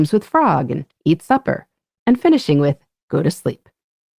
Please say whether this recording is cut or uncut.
uncut